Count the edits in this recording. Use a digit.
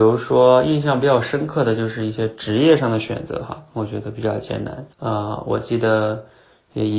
1